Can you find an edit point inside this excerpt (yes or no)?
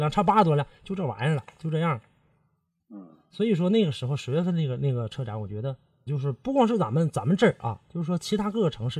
yes